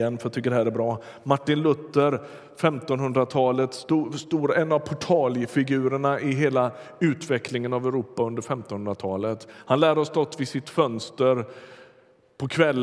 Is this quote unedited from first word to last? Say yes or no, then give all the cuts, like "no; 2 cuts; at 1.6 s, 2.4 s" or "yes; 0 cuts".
yes; 0 cuts